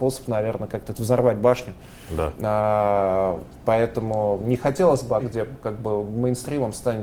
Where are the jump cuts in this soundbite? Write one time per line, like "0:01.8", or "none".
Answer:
0:04.4
0:05.2